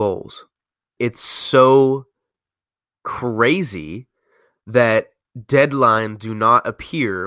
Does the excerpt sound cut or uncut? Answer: uncut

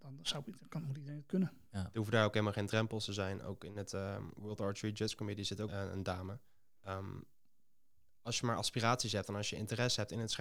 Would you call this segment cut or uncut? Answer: cut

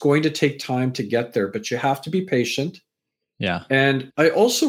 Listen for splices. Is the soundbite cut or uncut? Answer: uncut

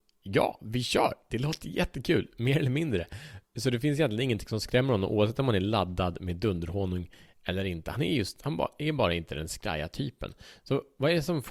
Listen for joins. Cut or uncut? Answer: uncut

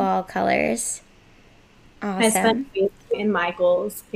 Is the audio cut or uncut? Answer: cut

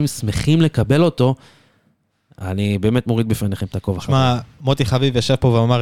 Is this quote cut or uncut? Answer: uncut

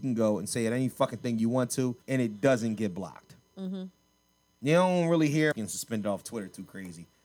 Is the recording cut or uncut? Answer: cut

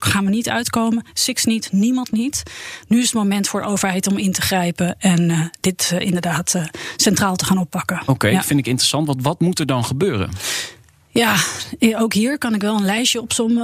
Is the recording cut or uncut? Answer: uncut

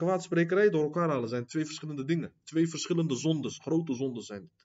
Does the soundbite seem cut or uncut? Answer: uncut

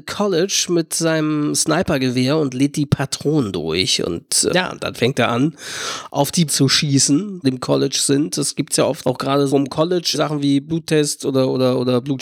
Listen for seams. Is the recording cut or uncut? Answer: cut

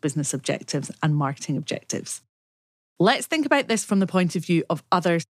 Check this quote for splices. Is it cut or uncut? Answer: uncut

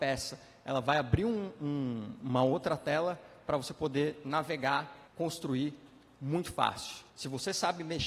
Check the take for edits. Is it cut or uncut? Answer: cut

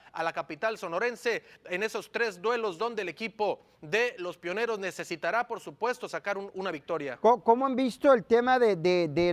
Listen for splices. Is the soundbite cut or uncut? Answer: uncut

